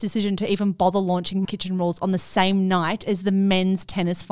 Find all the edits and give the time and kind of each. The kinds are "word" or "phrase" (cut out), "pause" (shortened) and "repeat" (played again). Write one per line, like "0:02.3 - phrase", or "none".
0:01.4 - word